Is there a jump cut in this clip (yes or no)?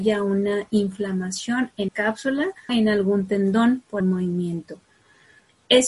yes